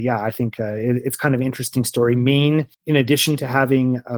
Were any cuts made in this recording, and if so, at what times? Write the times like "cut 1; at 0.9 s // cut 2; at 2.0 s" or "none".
cut 1; at 2.7 s